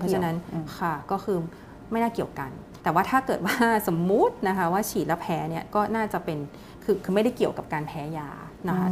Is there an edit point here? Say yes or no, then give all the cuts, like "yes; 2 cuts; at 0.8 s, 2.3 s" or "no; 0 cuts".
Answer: yes; 1 cut; at 2.8 s